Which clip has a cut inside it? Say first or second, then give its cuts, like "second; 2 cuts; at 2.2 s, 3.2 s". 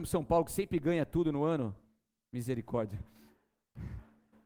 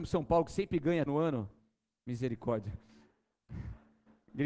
second; 1 cut; at 1.1 s